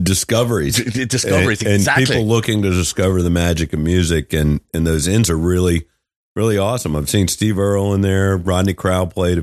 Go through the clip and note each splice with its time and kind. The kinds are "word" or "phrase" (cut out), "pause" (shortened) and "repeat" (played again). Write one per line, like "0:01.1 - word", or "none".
0:05.3 - word